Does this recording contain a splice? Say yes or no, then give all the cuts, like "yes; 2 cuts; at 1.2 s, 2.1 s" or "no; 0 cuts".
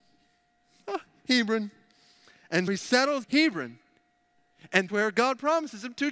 yes; 3 cuts; at 2.7 s, 3.2 s, 4.9 s